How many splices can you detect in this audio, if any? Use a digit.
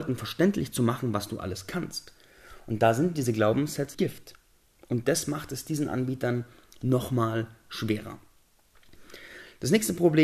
1